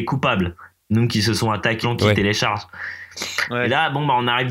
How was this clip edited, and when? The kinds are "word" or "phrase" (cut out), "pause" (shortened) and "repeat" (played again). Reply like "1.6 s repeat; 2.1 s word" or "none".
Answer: 1.8 s word

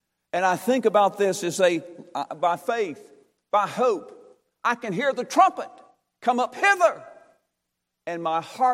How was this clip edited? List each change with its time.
2.3 s word

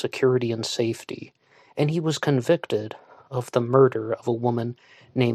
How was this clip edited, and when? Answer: none

